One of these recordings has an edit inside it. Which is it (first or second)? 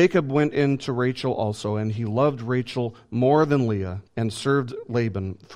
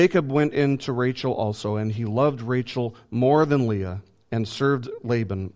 first